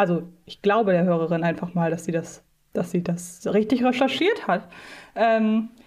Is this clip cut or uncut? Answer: cut